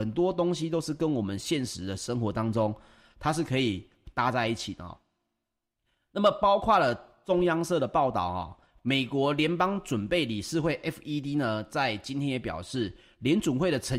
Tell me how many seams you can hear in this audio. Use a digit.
0